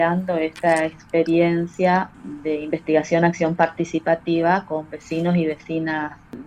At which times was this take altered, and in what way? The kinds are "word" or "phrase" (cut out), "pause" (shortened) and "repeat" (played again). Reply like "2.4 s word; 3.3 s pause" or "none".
none